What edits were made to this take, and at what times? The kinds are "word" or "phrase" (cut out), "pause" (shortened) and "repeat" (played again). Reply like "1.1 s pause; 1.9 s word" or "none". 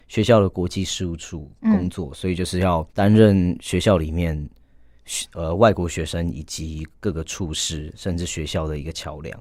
2.9 s pause; 7.0 s pause